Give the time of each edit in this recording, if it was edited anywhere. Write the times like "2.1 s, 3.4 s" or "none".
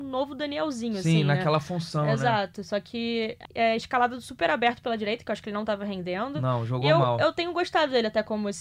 3.4 s

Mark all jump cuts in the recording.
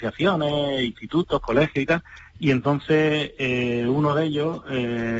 none

